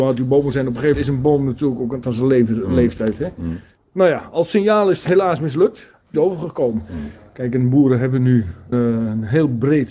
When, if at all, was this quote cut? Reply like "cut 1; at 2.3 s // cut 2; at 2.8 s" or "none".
cut 1; at 0.9 s // cut 2; at 2.0 s // cut 3; at 6.1 s // cut 4; at 8.7 s